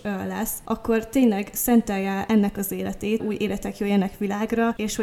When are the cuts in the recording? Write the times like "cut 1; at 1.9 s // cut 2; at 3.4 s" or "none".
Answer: cut 1; at 3.2 s